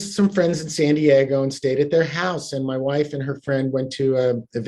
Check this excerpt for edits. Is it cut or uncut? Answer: uncut